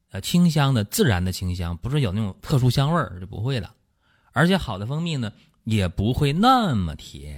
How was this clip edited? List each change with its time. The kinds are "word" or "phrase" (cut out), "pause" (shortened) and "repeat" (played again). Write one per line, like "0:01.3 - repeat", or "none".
none